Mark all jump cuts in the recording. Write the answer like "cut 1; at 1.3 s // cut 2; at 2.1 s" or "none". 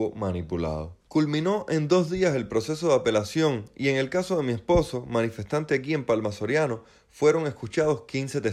cut 1; at 1.0 s

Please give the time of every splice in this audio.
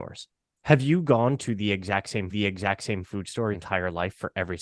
cut 1; at 2.3 s // cut 2; at 3.5 s

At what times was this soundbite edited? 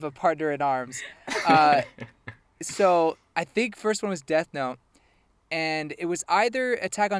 none

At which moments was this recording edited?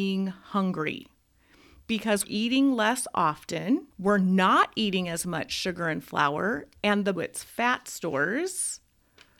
cut 1; at 2.2 s // cut 2; at 3.9 s // cut 3; at 7.2 s

